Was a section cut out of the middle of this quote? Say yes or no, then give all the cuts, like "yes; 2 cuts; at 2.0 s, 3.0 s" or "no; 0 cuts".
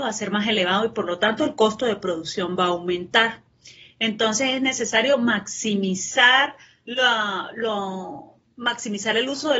no; 0 cuts